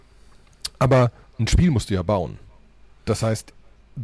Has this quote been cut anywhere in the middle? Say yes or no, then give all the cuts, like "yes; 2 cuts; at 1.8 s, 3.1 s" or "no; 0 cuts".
no; 0 cuts